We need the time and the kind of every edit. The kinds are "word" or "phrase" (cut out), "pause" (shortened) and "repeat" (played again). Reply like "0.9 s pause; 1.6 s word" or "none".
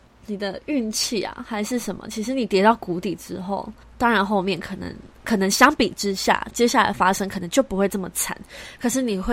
3.8 s pause